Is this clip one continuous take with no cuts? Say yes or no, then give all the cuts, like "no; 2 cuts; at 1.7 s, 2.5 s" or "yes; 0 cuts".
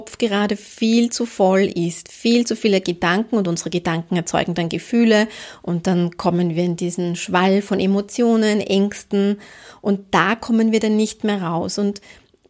yes; 0 cuts